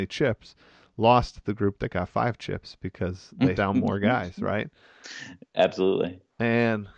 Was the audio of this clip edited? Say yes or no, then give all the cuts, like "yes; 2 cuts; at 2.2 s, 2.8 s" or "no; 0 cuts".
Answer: yes; 1 cut; at 3.6 s